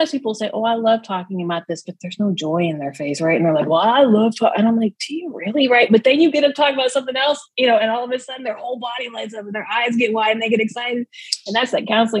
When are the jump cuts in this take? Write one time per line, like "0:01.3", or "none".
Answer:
none